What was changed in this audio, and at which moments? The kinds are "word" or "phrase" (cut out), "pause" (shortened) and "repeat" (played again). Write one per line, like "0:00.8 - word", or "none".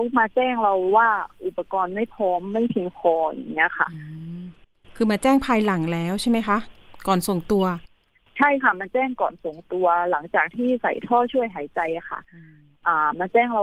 none

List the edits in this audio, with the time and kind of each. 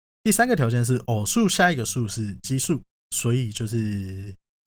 0:02.9 - pause

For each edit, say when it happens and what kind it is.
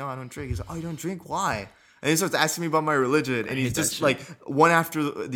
none

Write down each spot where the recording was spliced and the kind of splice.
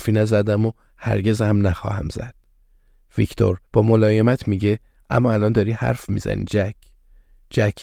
0:03.7 - pause

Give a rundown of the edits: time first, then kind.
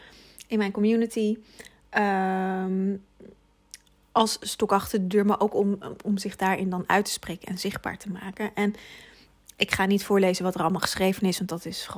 none

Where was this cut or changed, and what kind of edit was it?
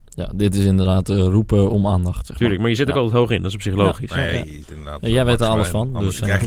0:04.6 - word

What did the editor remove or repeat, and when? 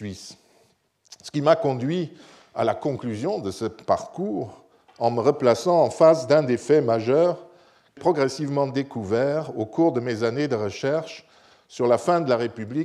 0:08.0 - word

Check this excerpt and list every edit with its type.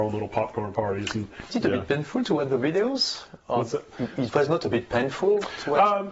0:01.5 - word

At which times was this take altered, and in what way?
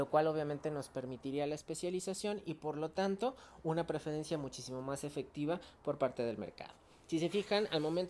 none

